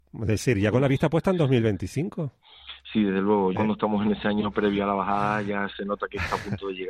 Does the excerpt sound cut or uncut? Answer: cut